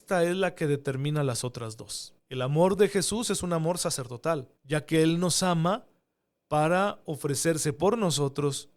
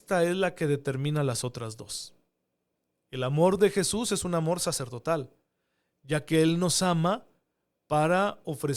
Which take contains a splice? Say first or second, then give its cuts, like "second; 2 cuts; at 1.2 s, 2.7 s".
first; 2 cuts; at 2.2 s, 4.6 s